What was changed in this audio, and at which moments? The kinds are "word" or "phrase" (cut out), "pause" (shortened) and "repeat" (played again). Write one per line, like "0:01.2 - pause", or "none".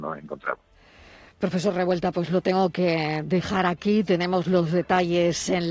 none